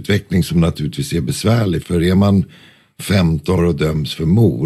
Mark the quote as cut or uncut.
cut